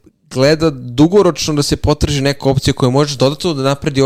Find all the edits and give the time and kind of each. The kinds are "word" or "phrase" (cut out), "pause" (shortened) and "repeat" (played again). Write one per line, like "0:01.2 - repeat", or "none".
none